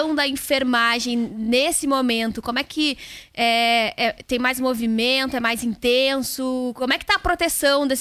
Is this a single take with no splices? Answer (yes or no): yes